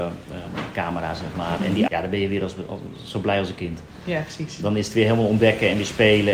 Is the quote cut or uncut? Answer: cut